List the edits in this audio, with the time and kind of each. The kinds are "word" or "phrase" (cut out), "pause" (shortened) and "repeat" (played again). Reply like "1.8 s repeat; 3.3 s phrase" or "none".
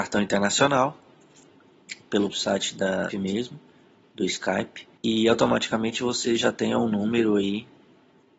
2.3 s word; 3.1 s word; 5.0 s pause